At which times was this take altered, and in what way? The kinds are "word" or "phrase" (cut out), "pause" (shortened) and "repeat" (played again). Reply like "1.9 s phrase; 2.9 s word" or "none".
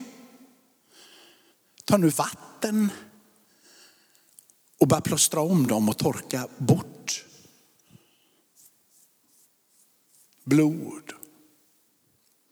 2.1 s word

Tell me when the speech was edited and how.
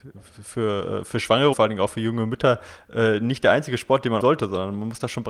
1.5 s word; 4.2 s word

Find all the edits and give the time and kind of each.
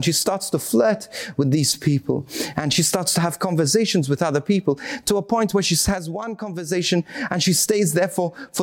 none

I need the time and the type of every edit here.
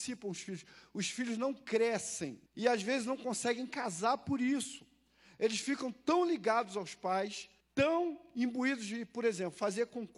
2.5 s pause; 7.6 s pause

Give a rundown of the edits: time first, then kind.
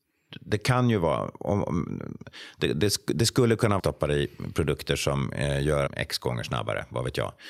3.8 s phrase; 5.9 s phrase

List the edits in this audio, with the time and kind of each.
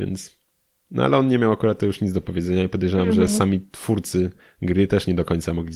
none

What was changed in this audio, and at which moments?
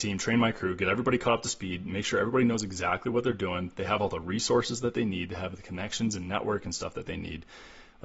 none

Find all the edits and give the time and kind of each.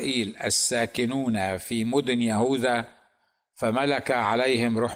none

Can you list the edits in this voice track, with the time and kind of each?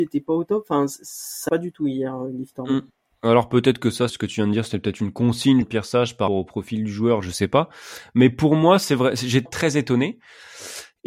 1.5 s word; 4.1 s word; 5.6 s word; 6.3 s word; 9.5 s word

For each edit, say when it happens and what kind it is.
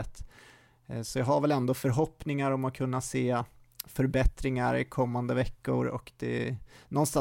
none

